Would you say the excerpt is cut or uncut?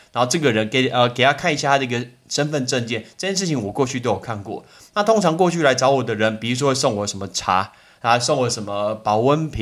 uncut